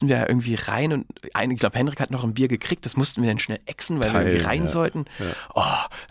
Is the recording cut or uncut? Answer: uncut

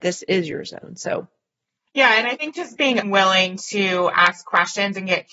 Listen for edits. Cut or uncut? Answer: cut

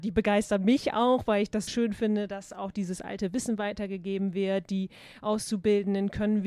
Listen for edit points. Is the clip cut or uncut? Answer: cut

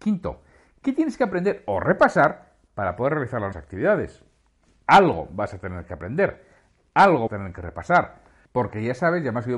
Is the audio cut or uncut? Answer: cut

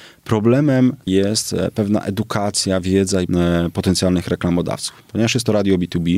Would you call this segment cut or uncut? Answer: cut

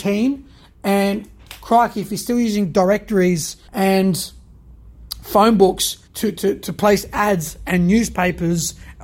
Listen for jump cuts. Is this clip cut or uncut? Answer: cut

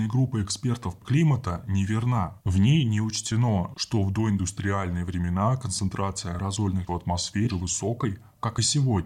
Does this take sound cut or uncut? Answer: cut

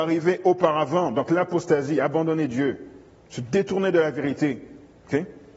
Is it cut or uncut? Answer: uncut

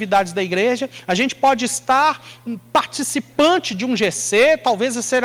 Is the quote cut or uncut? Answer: uncut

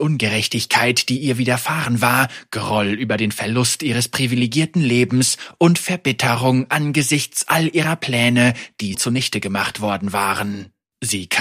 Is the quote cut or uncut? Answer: cut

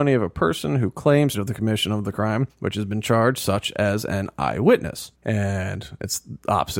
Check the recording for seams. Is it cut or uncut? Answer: cut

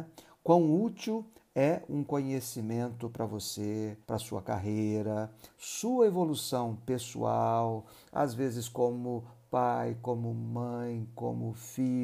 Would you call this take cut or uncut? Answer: cut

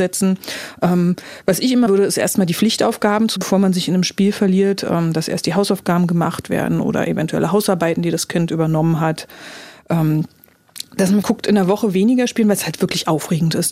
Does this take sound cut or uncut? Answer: cut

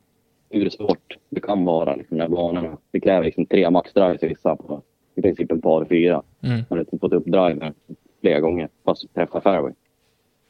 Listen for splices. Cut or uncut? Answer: cut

